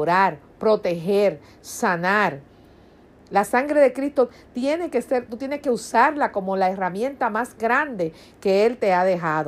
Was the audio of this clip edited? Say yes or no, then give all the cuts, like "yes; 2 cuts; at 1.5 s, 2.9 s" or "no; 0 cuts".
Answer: no; 0 cuts